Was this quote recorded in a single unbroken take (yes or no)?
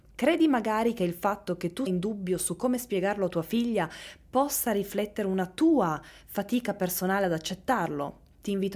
no